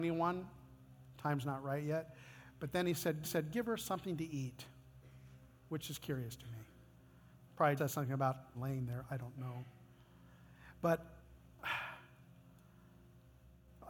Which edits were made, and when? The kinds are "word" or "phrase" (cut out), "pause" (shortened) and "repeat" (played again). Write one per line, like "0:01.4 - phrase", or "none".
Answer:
0:03.2 - repeat
0:07.8 - word
0:08.5 - phrase